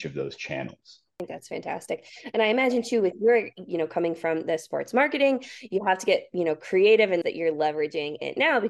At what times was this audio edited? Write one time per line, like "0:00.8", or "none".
0:07.2

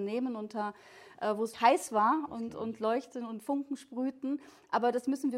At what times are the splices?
0:01.5

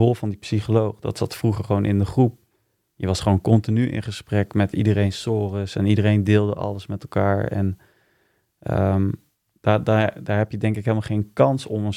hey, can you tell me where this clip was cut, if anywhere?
none

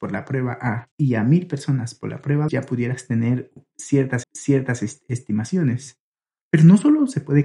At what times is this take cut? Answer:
0:00.9
0:02.5
0:04.2

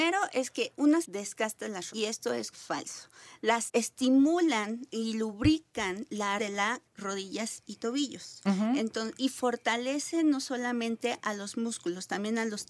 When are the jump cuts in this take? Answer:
0:01.0
0:01.9
0:02.5
0:03.7
0:06.4
0:06.9

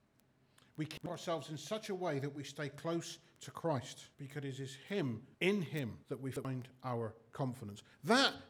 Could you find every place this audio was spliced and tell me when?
0:04.1
0:05.3
0:06.0

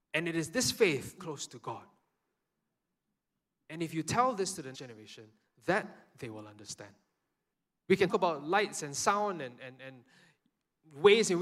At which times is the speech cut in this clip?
0:01.2
0:04.7
0:07.5
0:08.1

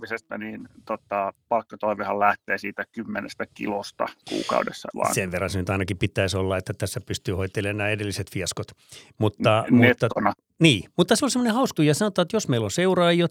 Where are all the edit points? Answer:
0:04.9
0:11.2
0:11.8

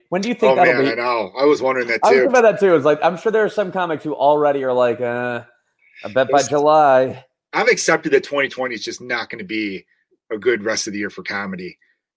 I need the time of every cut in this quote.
none

